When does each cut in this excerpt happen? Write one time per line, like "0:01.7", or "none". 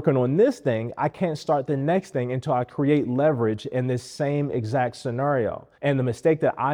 0:05.7